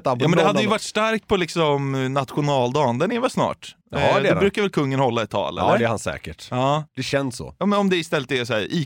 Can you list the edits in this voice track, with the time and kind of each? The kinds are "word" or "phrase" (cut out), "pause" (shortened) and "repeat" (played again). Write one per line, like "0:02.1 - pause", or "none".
0:03.8 - pause
0:06.9 - pause